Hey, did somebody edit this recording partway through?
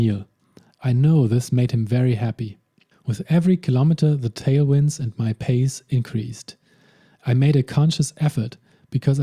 yes; 1 cut; at 2.9 s

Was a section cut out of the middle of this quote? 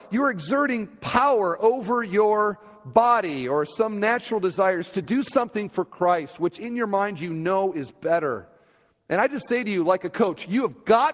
no; 0 cuts

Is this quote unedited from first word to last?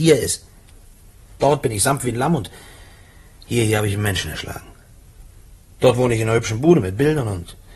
yes; 0 cuts

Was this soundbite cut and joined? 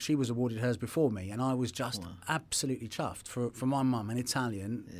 no; 0 cuts

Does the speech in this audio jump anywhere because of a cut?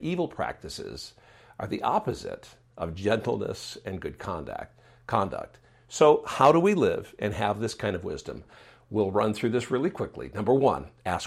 no; 0 cuts

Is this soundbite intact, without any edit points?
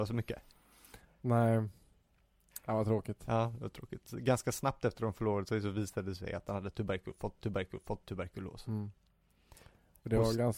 no; 1 cut; at 7.4 s

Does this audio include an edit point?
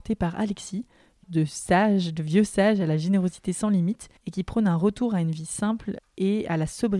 yes; 2 cuts; at 1.2 s, 4.2 s

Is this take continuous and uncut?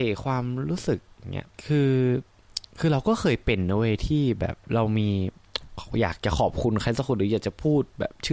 no; 1 cut; at 1.5 s

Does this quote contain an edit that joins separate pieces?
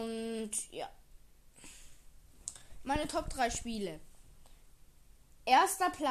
no; 0 cuts

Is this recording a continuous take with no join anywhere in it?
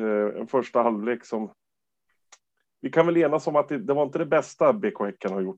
yes; 0 cuts

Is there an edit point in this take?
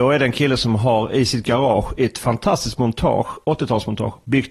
no; 0 cuts

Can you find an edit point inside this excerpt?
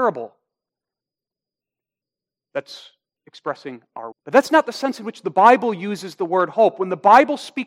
yes; 2 cuts; at 3.2 s, 4.1 s

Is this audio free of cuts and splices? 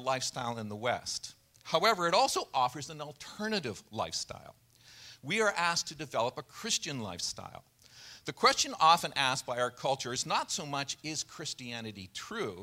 yes; 0 cuts

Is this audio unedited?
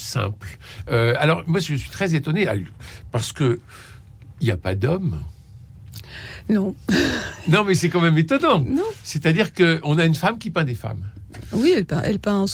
no; 1 cut; at 9.8 s

